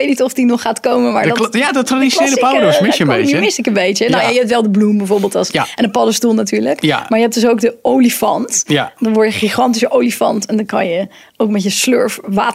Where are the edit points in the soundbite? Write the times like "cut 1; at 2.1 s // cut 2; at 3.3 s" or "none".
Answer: none